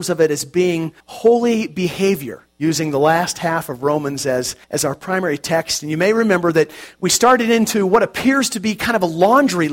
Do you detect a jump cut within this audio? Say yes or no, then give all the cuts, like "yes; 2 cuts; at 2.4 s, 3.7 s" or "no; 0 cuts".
yes; 2 cuts; at 1.0 s, 4.6 s